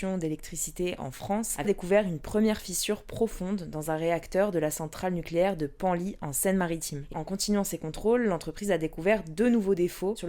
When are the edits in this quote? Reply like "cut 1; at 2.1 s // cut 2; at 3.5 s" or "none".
cut 1; at 1.6 s // cut 2; at 7.1 s